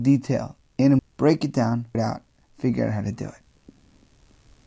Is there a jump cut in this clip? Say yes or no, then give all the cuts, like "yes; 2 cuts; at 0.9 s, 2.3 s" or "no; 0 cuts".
yes; 2 cuts; at 1.0 s, 1.9 s